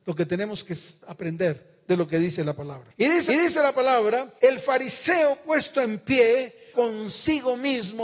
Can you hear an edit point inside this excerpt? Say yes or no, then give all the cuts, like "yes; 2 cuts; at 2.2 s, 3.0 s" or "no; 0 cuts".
yes; 4 cuts; at 1.0 s, 3.3 s, 4.4 s, 6.7 s